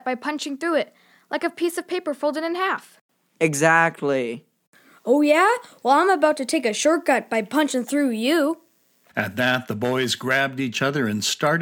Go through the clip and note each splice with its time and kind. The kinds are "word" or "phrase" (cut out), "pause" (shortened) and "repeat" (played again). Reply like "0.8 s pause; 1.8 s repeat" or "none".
none